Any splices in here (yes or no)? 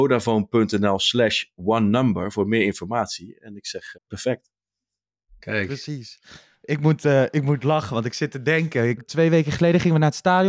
yes